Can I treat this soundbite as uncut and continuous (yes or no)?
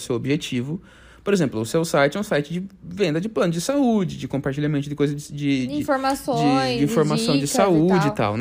yes